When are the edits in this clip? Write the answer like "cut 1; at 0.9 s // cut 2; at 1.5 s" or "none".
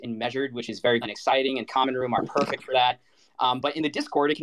cut 1; at 1.0 s // cut 2; at 1.7 s